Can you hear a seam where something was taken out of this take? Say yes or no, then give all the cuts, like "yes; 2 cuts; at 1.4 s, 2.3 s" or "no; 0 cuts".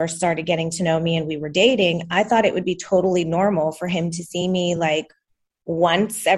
no; 0 cuts